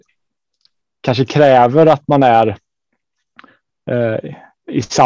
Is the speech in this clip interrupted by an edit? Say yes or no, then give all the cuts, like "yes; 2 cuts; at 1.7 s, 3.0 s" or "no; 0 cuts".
no; 0 cuts